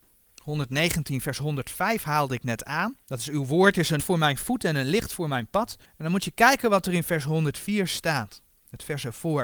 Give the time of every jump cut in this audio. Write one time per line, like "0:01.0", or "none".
0:03.0
0:04.0
0:05.8